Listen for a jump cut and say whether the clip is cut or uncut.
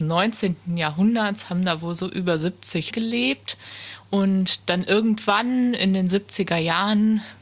cut